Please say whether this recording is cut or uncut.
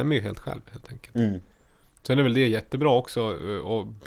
uncut